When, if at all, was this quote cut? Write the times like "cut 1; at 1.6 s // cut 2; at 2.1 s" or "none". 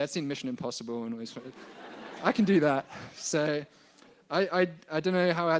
none